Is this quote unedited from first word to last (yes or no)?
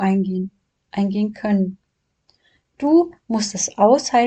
yes